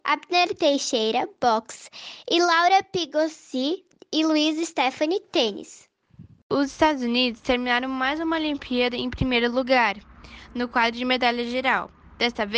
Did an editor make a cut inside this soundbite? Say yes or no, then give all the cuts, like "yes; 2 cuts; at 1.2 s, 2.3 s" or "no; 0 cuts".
no; 0 cuts